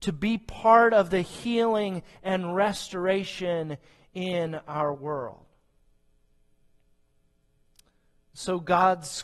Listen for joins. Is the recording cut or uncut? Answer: uncut